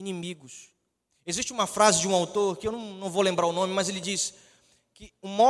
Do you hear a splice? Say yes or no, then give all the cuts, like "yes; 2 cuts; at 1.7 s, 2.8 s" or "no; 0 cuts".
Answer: no; 0 cuts